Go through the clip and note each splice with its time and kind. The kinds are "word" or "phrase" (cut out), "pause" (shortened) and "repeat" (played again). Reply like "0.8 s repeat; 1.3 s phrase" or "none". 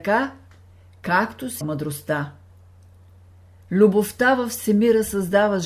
1.6 s word